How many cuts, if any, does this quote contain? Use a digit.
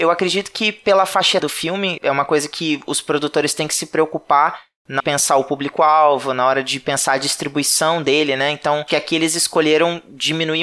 3